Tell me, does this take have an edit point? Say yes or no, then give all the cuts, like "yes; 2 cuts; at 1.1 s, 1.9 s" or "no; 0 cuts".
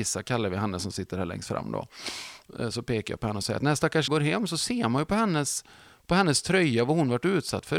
yes; 1 cut; at 4.1 s